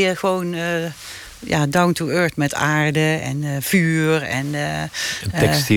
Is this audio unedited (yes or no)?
yes